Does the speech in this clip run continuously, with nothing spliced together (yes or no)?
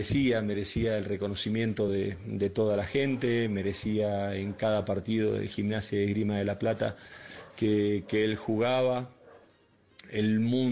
yes